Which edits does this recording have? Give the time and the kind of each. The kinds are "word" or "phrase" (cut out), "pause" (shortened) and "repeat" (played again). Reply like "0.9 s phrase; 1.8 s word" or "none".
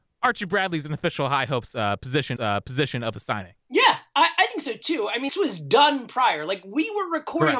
2.4 s repeat; 3.6 s pause; 5.3 s word